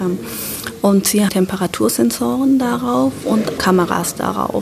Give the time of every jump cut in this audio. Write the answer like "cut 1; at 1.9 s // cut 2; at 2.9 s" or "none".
cut 1; at 1.3 s // cut 2; at 3.6 s

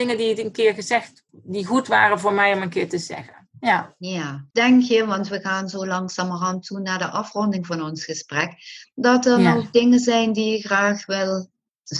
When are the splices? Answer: cut 1; at 1.3 s // cut 2; at 4.5 s

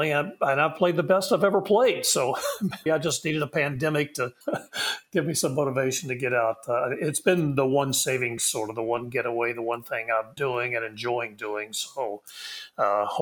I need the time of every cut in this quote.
cut 1; at 2.9 s // cut 2; at 4.4 s // cut 3; at 8.4 s // cut 4; at 10.4 s

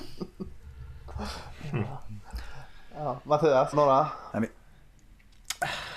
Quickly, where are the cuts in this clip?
cut 1; at 3.7 s

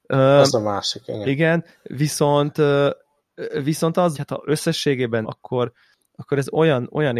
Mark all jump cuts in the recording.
cut 1; at 4.1 s // cut 2; at 5.2 s

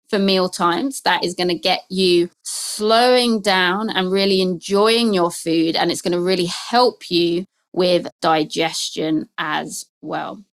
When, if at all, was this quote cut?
none

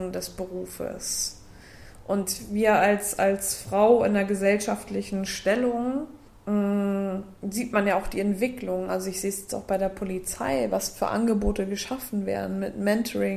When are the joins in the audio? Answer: cut 1; at 6.3 s

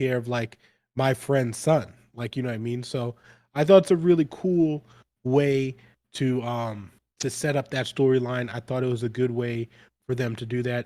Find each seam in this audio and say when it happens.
none

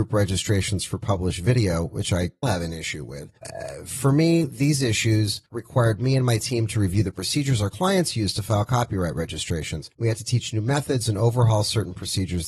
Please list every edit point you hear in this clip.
cut 1; at 2.4 s // cut 2; at 3.4 s // cut 3; at 5.5 s // cut 4; at 9.9 s

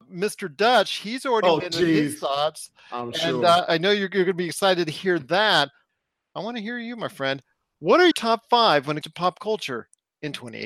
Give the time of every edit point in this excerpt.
cut 1; at 1.6 s // cut 2; at 3.7 s // cut 3; at 8.1 s // cut 4; at 9.0 s

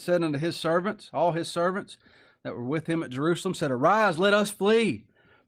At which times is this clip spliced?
none

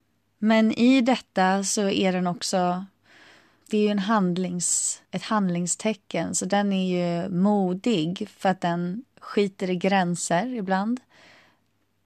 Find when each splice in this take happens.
cut 1; at 3.6 s // cut 2; at 5.0 s // cut 3; at 9.1 s

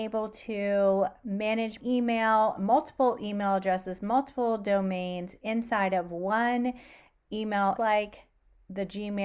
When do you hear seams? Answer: cut 1; at 1.8 s // cut 2; at 7.8 s

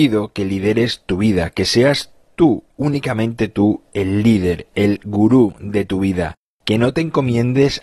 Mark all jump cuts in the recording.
none

